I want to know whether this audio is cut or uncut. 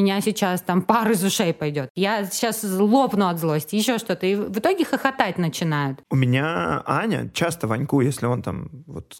cut